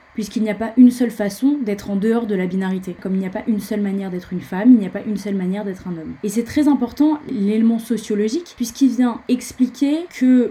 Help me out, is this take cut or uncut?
uncut